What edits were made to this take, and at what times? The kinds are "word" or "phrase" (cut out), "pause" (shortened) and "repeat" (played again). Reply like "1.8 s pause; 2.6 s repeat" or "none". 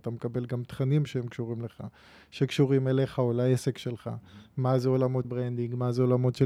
5.2 s word